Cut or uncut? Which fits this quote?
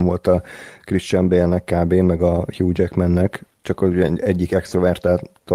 uncut